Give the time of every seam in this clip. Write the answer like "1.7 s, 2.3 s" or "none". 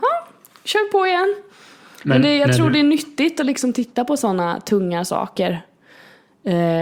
none